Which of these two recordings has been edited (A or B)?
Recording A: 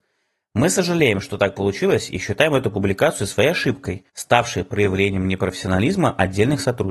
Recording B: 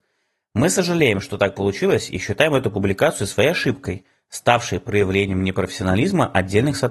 A